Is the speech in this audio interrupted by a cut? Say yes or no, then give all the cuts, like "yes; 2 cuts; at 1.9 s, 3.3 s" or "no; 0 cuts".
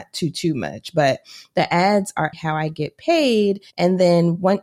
yes; 2 cuts; at 2.3 s, 3.7 s